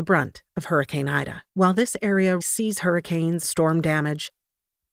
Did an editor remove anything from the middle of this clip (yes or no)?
yes